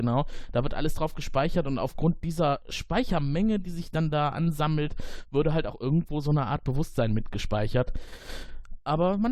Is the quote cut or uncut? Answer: uncut